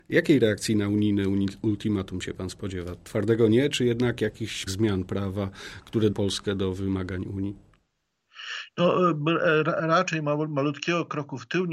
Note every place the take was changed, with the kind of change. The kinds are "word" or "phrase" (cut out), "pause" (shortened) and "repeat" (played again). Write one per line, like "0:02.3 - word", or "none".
0:04.7 - word
0:06.1 - word